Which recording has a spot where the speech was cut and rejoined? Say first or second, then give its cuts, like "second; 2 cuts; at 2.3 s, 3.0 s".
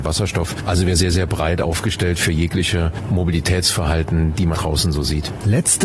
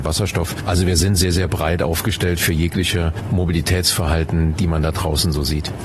first; 2 cuts; at 1.0 s, 4.5 s